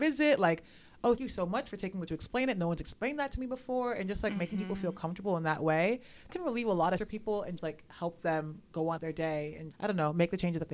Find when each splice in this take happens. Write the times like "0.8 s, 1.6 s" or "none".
1.2 s, 2.1 s, 6.3 s, 7.0 s, 7.6 s, 9.0 s, 9.7 s